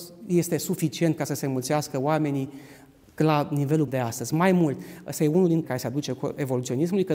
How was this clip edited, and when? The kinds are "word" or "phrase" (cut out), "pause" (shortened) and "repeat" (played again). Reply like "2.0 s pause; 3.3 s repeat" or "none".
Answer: 3.9 s word; 5.6 s word